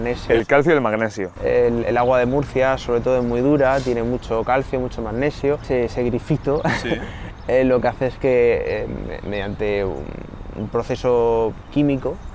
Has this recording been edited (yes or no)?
no